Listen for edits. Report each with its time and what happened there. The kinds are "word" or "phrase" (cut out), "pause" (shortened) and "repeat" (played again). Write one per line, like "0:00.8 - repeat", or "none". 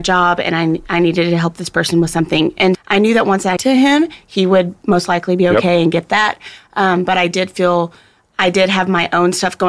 0:02.7 - word
0:03.6 - phrase